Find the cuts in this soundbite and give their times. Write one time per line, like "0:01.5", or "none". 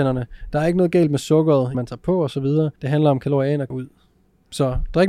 0:01.7
0:02.8
0:03.7